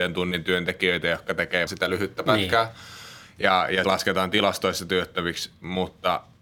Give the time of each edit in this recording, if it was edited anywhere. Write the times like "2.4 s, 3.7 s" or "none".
1.7 s, 3.8 s